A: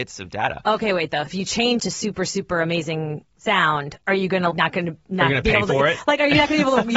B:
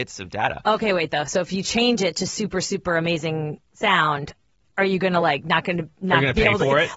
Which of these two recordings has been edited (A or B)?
A